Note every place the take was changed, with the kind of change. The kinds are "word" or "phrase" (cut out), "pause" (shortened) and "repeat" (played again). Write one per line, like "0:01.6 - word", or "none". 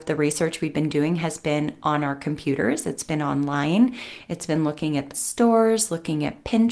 0:05.1 - phrase